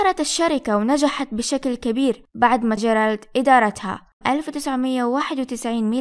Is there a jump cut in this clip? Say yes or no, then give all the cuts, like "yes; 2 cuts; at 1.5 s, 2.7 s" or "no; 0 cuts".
yes; 2 cuts; at 2.8 s, 4.2 s